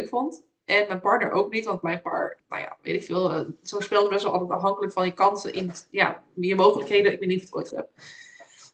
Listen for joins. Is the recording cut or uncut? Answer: cut